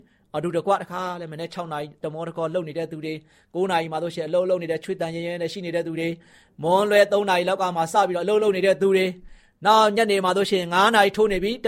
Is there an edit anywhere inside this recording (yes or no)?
no